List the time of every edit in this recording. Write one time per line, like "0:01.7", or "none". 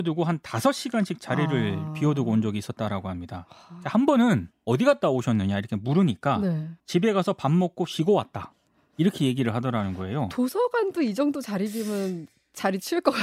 0:04.5
0:06.8